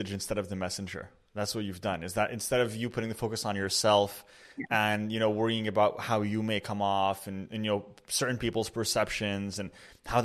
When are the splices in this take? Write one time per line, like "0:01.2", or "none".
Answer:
none